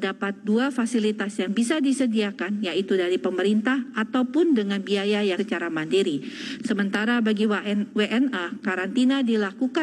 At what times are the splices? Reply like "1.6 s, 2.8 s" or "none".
5.4 s